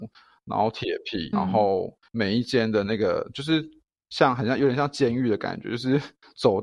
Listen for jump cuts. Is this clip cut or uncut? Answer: cut